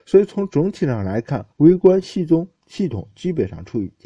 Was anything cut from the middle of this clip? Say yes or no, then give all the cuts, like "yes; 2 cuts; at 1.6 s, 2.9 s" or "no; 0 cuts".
yes; 1 cut; at 1.5 s